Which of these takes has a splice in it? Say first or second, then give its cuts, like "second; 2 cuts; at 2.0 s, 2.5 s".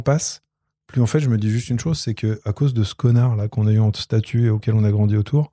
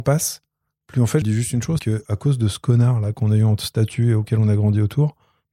second; 2 cuts; at 1.2 s, 1.8 s